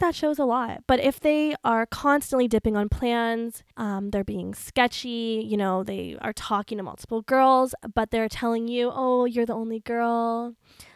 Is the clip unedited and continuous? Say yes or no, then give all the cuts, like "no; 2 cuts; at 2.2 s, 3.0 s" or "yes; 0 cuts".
no; 1 cut; at 3.7 s